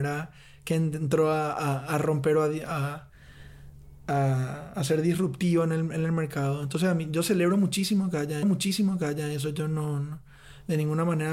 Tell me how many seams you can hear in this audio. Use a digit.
1